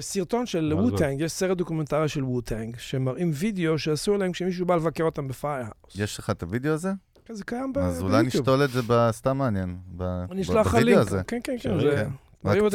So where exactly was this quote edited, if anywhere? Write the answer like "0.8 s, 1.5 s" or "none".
none

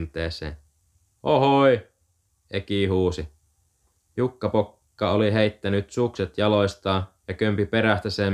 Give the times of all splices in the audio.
none

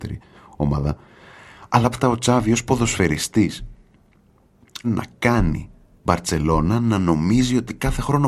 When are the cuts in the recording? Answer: 1.9 s, 4.8 s, 6.0 s

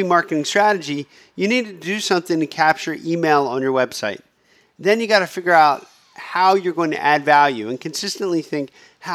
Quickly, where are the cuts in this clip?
none

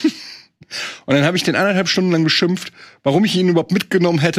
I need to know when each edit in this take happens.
none

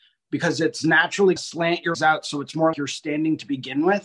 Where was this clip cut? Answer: 1.4 s, 1.9 s, 2.7 s

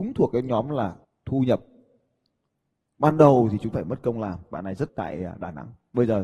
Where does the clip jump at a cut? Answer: 1.0 s, 3.7 s, 4.9 s

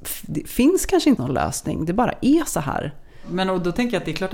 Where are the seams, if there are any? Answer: 1.2 s

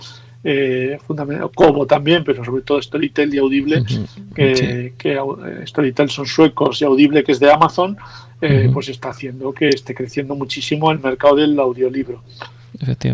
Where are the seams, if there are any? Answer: none

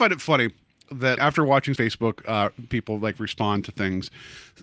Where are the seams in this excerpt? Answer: 1.2 s, 1.8 s

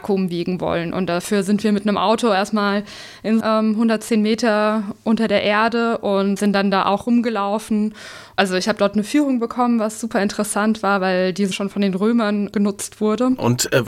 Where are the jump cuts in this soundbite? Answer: 3.4 s, 6.4 s, 11.5 s

